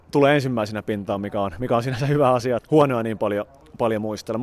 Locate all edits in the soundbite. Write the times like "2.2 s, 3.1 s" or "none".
2.6 s